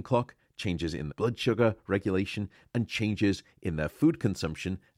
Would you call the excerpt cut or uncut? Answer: cut